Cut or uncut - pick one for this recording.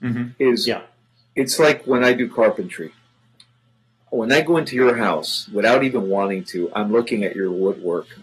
uncut